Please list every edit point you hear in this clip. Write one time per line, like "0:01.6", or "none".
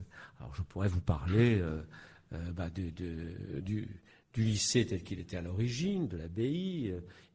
none

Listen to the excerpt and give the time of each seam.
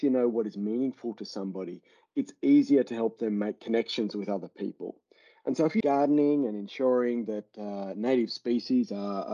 0:05.8

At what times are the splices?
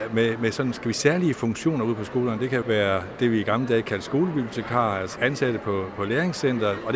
0:00.9
0:02.6
0:05.2

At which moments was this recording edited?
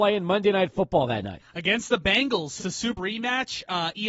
0:02.6
0:03.0

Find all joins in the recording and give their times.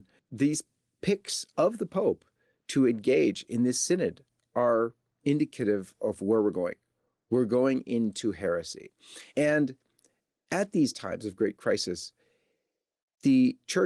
0:09.3

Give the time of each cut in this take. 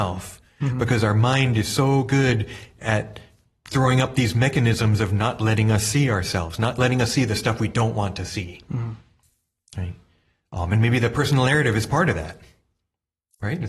none

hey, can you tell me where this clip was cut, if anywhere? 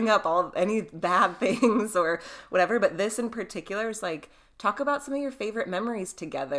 none

